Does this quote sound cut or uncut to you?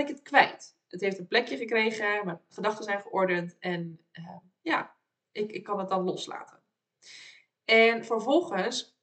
uncut